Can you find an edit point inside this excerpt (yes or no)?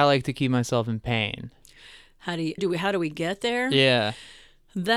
yes